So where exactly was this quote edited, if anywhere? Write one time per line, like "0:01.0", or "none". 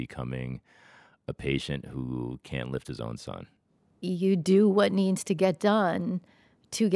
none